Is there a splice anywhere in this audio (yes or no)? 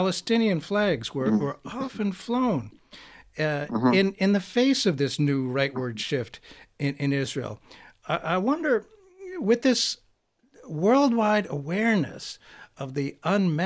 no